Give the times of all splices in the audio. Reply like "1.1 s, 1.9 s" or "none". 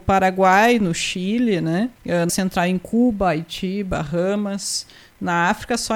2.0 s, 2.3 s

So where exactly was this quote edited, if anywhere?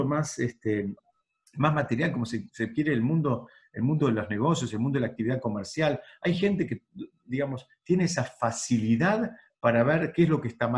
none

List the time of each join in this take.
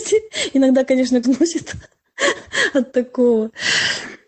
1.2 s

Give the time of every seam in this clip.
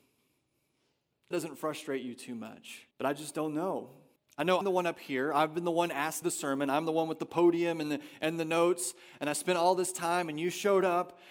1.3 s, 2.9 s, 4.2 s, 4.6 s, 6.2 s

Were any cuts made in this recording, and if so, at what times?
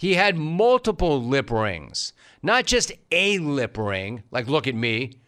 none

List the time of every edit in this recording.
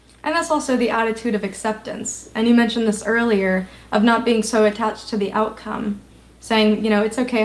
none

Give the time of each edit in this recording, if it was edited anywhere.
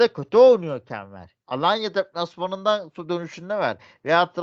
1.4 s

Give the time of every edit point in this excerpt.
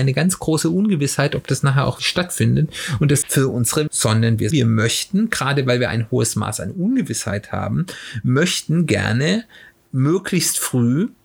2.0 s, 3.2 s, 3.9 s, 4.5 s

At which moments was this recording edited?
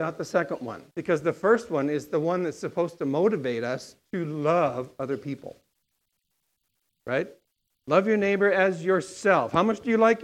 0.9 s, 7.7 s

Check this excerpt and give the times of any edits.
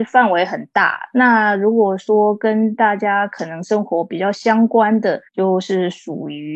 5.3 s

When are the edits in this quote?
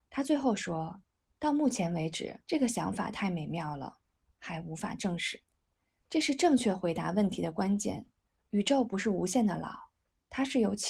2.4 s, 5.4 s

